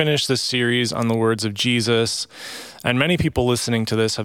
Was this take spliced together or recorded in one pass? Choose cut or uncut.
uncut